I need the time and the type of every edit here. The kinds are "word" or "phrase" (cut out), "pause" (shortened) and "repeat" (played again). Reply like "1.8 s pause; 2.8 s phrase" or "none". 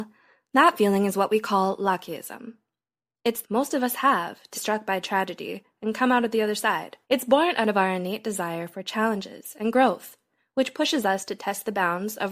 3.4 s phrase; 4.5 s word; 7.0 s pause